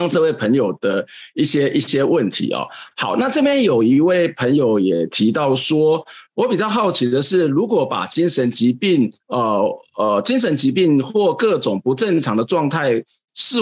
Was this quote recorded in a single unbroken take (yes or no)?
no